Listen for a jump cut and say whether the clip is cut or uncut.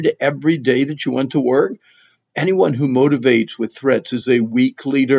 uncut